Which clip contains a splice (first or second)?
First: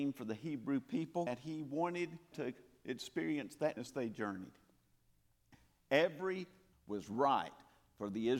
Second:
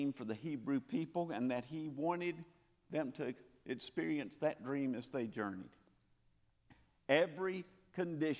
first